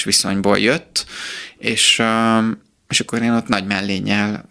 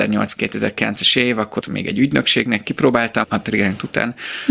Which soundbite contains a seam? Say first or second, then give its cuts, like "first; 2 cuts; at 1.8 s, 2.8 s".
second; 2 cuts; at 1.6 s, 3.2 s